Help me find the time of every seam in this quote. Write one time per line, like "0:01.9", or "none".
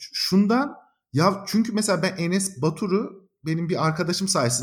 none